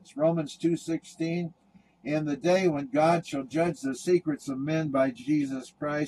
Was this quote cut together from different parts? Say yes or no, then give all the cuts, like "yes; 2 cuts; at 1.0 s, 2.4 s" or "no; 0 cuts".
no; 0 cuts